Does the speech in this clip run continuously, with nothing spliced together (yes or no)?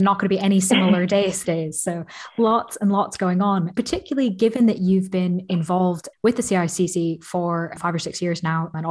no